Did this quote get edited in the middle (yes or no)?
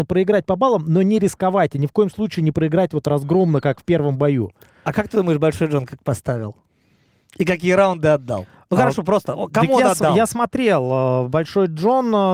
no